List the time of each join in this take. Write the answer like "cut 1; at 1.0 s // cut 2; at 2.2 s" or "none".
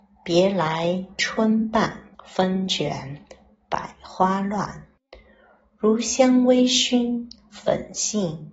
cut 1; at 2.1 s